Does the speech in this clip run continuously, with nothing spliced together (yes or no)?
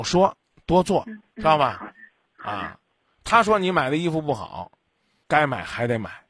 no